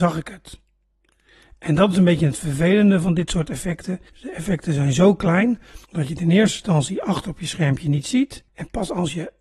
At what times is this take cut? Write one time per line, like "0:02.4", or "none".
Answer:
0:04.1
0:05.8
0:08.5